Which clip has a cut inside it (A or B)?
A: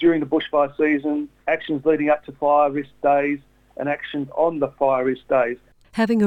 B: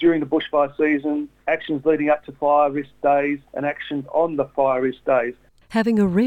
B